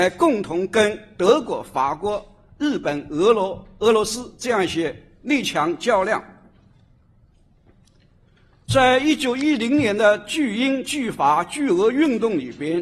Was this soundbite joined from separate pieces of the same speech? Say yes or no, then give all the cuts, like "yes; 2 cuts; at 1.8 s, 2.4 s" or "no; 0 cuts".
no; 0 cuts